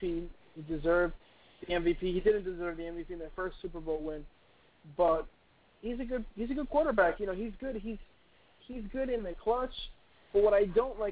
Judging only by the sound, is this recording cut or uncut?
uncut